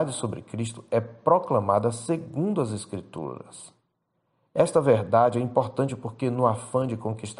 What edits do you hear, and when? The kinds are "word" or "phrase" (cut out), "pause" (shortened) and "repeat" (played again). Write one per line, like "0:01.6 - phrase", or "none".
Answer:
none